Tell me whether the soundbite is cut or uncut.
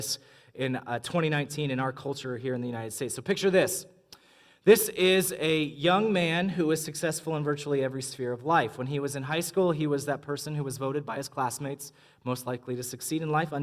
uncut